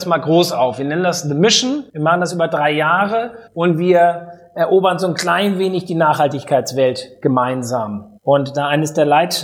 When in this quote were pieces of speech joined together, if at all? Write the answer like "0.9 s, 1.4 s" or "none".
1.9 s, 3.5 s, 8.2 s